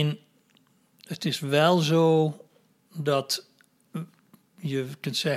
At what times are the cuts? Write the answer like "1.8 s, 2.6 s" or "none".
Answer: none